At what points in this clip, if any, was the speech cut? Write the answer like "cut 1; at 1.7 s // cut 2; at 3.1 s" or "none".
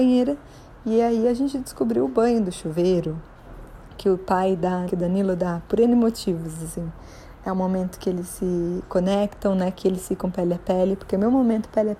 cut 1; at 4.9 s